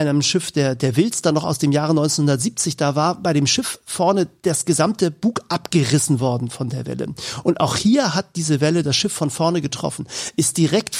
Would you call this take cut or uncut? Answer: uncut